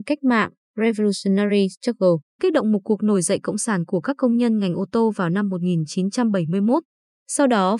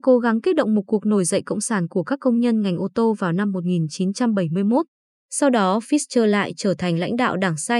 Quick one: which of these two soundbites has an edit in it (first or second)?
first